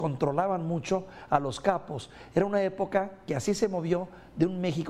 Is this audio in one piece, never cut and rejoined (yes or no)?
yes